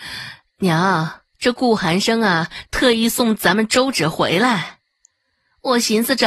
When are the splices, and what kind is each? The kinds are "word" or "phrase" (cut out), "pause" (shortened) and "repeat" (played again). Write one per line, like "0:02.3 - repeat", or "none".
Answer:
0:01.3 - pause